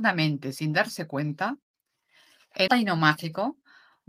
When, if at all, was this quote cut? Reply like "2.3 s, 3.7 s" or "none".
2.7 s